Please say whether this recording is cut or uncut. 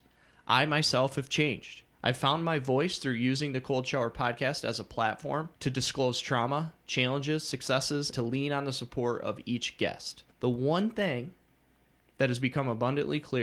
cut